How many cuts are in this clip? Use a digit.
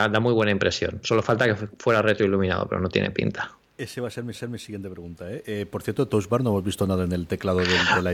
1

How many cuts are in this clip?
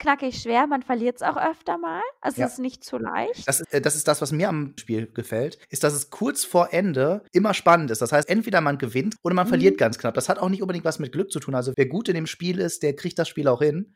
7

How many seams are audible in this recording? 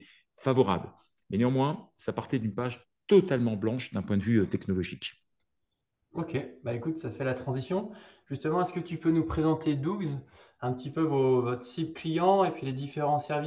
0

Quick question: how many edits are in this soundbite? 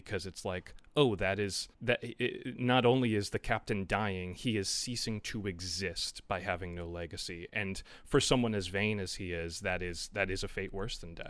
1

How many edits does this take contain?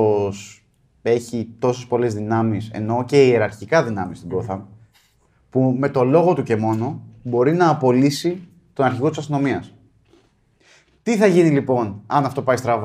0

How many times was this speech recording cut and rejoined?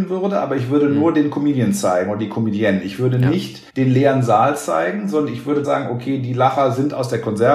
2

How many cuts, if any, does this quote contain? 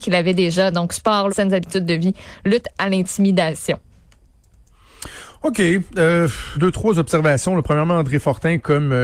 2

